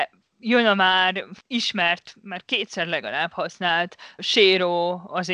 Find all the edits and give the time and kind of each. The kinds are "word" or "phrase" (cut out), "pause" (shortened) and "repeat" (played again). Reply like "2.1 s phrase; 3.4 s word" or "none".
1.4 s pause; 4.2 s word